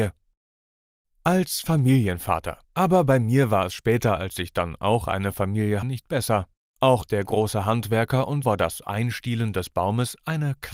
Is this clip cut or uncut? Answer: cut